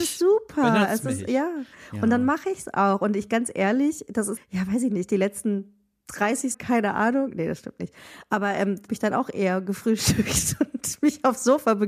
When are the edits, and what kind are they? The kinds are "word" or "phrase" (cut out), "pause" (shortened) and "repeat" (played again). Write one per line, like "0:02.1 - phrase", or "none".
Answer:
0:04.4 - word
0:06.5 - word
0:08.9 - phrase